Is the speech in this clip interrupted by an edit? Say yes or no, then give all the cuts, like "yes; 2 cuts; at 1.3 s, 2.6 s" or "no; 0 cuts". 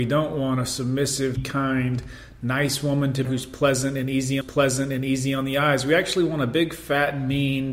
yes; 3 cuts; at 1.3 s, 3.2 s, 4.4 s